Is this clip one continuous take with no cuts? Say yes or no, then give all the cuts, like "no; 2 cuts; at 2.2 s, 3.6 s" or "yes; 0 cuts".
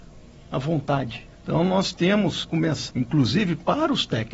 no; 3 cuts; at 1.3 s, 2.4 s, 2.9 s